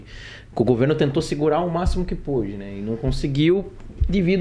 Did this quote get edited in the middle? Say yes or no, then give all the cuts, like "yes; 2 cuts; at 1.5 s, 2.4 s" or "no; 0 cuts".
no; 0 cuts